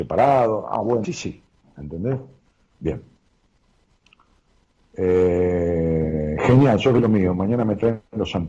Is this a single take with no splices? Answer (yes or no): no